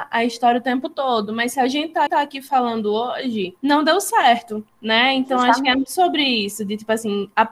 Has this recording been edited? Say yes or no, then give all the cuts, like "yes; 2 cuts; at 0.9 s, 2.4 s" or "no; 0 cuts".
yes; 4 cuts; at 2.1 s, 3.6 s, 4.7 s, 5.9 s